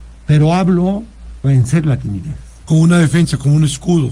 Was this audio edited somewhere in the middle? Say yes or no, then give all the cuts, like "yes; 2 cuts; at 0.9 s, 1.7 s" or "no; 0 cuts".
yes; 1 cut; at 1.4 s